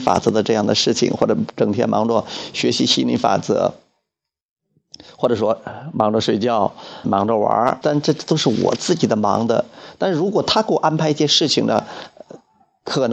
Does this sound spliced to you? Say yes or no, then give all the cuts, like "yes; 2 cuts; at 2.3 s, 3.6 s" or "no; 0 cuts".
yes; 2 cuts; at 7.0 s, 7.8 s